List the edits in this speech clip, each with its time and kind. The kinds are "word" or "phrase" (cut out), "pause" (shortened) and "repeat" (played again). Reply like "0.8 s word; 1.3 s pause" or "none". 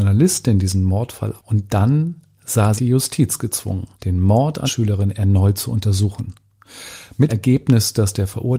1.4 s word; 2.8 s word; 3.9 s pause; 4.7 s word; 7.3 s word

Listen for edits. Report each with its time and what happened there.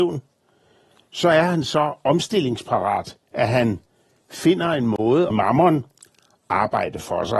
3.2 s pause; 5.3 s phrase

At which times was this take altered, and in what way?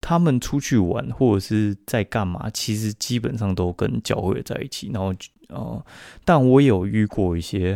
none

